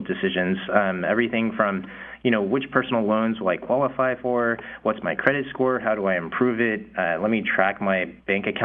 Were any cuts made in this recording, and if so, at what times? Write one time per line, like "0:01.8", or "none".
none